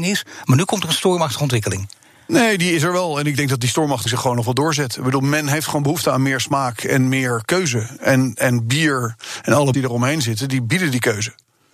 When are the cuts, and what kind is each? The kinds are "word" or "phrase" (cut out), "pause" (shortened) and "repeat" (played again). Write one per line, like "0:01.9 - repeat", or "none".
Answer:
0:04.1 - word
0:09.7 - word